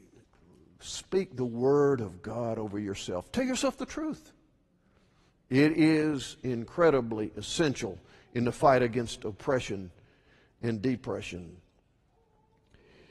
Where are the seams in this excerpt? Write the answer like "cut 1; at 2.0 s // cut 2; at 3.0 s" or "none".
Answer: none

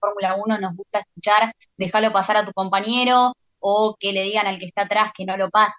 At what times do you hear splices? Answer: none

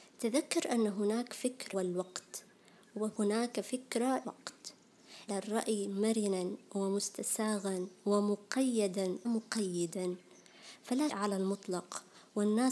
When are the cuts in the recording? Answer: cut 1; at 1.7 s // cut 2; at 4.2 s // cut 3; at 5.3 s // cut 4; at 9.2 s // cut 5; at 11.1 s

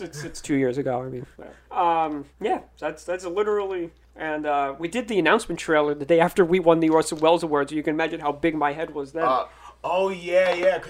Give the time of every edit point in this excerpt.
cut 1; at 1.3 s // cut 2; at 2.3 s // cut 3; at 4.0 s

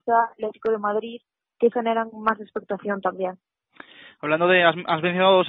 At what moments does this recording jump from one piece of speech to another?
cut 1; at 1.7 s

